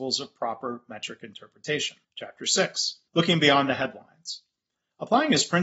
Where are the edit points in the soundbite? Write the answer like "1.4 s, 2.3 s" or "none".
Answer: 2.0 s, 3.1 s

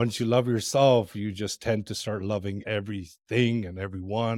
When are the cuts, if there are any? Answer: none

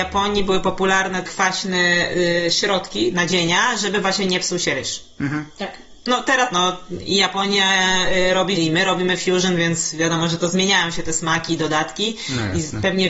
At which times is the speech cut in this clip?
1.2 s, 6.5 s, 8.6 s

